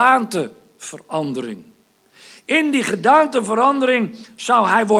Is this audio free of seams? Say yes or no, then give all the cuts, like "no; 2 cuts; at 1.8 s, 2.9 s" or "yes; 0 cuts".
yes; 0 cuts